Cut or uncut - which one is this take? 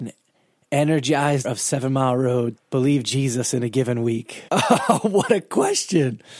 cut